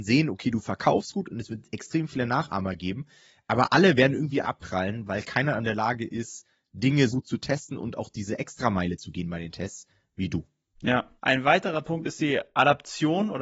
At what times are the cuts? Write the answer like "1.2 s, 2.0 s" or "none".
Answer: 4.4 s, 7.1 s, 11.2 s